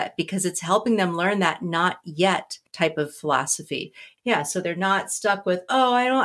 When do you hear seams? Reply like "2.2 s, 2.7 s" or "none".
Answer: 2.7 s